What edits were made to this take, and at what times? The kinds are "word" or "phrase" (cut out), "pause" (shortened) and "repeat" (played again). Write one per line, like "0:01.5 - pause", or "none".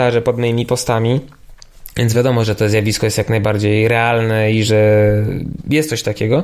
none